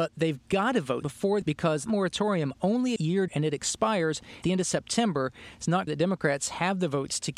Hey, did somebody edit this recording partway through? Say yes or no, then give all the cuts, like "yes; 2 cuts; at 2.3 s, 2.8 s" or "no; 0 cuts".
yes; 7 cuts; at 1.0 s, 1.4 s, 1.9 s, 3.0 s, 3.3 s, 4.4 s, 5.9 s